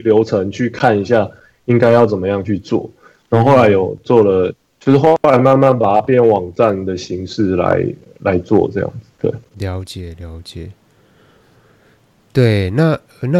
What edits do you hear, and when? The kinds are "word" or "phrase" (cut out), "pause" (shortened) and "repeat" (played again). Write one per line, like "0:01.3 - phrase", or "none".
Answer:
none